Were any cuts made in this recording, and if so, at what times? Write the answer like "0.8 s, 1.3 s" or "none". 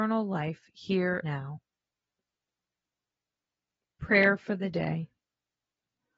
1.2 s